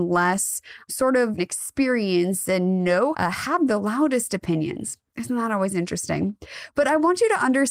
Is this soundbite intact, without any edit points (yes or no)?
no